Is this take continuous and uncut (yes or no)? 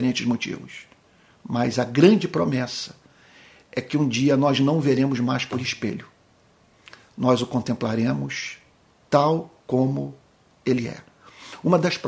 yes